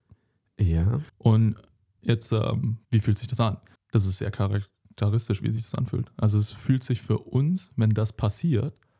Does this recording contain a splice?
yes; 3 cuts; at 1.1 s, 2.8 s, 3.7 s

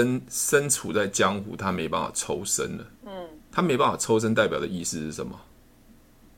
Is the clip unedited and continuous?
no; 1 cut; at 3.0 s

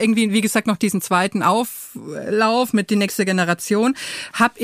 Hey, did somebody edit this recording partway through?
no; 0 cuts

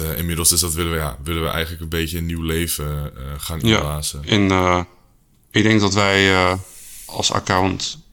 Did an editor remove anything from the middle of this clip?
no; 0 cuts

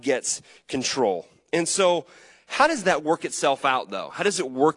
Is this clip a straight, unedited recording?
yes; 0 cuts

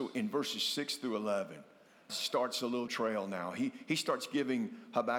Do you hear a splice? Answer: yes; 2 cuts; at 2.1 s, 2.9 s

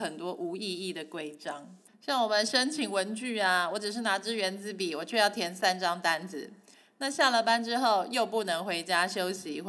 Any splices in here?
no; 0 cuts

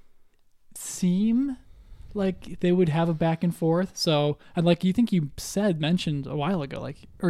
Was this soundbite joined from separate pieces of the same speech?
no; 0 cuts

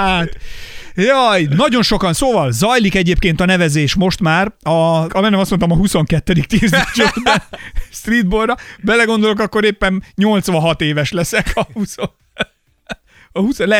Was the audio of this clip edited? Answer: yes; 1 cut; at 5.1 s

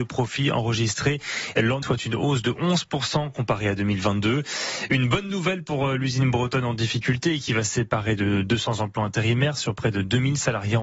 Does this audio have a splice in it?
yes; 1 cut; at 1.8 s

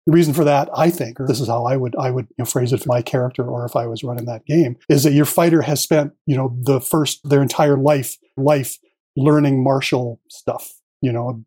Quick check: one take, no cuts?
no; 5 cuts; at 1.3 s, 2.8 s, 4.8 s, 7.2 s, 8.4 s

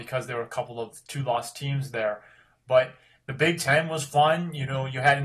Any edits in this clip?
no; 0 cuts

